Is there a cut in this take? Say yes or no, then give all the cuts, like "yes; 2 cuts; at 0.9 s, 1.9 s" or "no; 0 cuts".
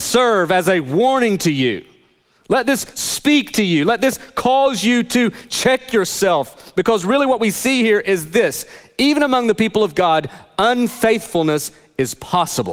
no; 0 cuts